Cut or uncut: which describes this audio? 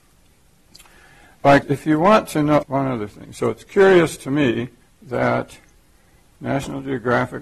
cut